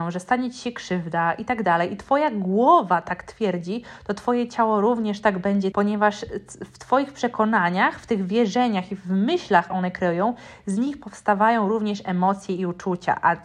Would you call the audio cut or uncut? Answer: cut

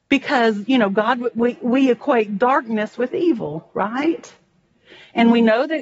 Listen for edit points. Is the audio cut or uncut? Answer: uncut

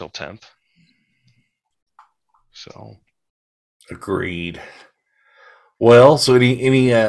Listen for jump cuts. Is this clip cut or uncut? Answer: uncut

